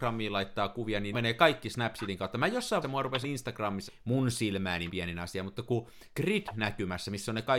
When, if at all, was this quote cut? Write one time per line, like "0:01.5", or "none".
0:01.1
0:02.8
0:03.2
0:03.9
0:04.9
0:06.1